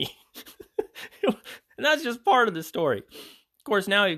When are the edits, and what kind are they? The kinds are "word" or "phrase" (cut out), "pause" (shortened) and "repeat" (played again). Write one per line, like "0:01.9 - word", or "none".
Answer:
none